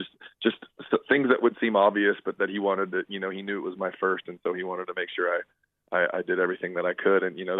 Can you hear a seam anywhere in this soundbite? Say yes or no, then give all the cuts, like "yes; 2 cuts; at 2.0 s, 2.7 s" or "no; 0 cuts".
no; 0 cuts